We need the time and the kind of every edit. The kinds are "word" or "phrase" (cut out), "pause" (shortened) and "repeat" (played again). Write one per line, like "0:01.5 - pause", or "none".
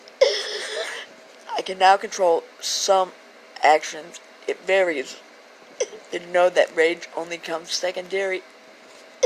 0:05.3 - pause